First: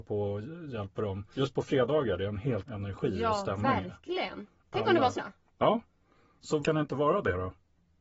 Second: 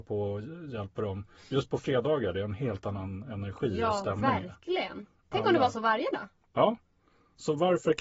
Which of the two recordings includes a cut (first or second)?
first